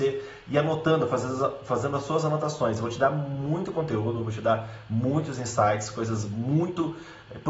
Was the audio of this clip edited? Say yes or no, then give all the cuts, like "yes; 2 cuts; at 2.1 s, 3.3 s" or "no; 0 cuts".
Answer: no; 0 cuts